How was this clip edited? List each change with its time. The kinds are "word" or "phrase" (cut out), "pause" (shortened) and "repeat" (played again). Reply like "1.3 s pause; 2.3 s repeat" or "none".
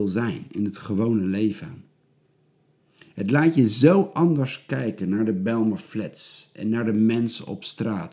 none